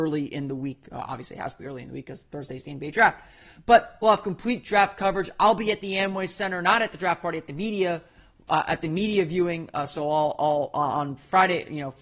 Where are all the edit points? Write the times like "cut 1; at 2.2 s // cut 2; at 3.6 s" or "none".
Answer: none